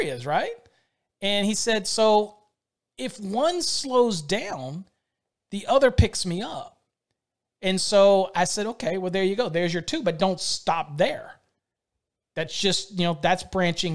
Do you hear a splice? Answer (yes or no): no